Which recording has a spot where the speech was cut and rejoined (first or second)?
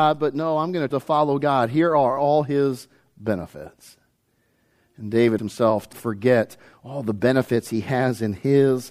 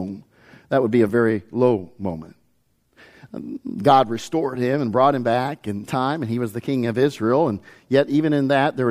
first